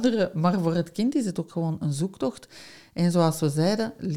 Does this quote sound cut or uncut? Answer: uncut